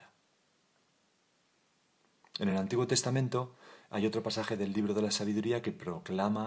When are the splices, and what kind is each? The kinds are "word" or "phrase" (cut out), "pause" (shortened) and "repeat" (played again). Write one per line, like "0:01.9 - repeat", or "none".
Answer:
none